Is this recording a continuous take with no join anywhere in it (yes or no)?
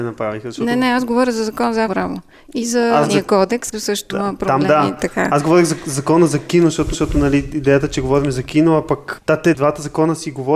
no